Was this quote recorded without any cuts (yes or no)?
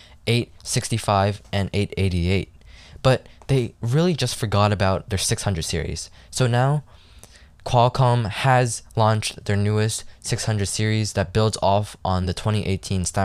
yes